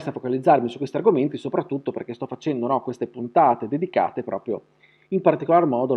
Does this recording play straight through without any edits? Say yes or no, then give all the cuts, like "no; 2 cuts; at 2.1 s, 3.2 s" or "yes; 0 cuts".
yes; 0 cuts